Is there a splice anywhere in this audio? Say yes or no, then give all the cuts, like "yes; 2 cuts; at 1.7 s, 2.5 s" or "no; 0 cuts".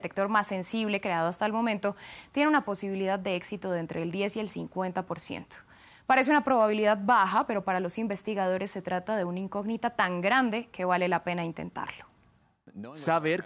no; 0 cuts